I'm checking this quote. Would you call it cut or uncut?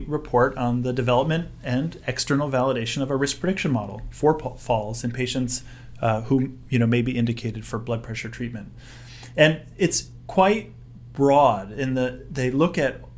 uncut